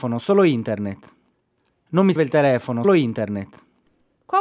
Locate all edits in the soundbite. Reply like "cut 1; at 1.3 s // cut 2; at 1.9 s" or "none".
cut 1; at 2.2 s // cut 2; at 2.8 s